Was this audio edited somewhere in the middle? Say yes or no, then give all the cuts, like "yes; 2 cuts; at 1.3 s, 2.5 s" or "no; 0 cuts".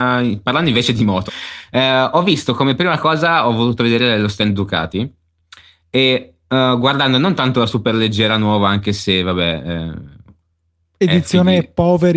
yes; 1 cut; at 1.3 s